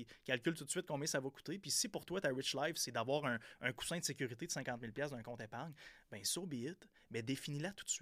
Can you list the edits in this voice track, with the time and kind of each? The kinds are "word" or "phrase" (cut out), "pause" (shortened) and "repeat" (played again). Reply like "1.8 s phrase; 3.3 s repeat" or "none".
none